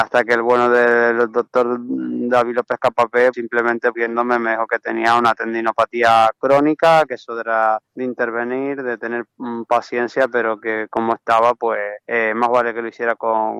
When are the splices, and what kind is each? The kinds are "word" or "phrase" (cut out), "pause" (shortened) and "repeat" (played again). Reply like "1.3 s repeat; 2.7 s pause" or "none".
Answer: 3.3 s word; 3.9 s word; 7.9 s pause; 12.0 s pause